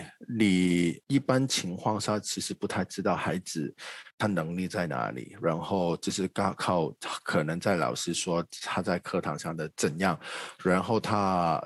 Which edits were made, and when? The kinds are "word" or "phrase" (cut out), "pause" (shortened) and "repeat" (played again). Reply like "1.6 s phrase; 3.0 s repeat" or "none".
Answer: 4.1 s pause

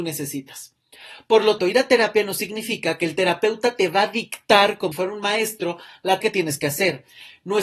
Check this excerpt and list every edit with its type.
1.6 s word; 4.9 s word; 6.2 s word

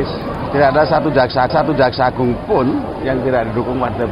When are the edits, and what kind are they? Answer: 1.5 s repeat

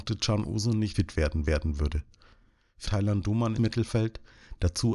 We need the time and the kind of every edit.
0.9 s word; 1.4 s repeat; 2.8 s phrase; 3.6 s word

